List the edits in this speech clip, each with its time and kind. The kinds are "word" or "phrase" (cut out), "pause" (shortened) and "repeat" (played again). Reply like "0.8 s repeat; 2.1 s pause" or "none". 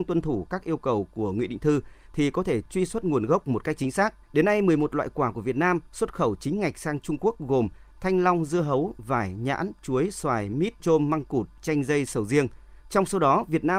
4.2 s pause; 10.8 s word; 12.8 s pause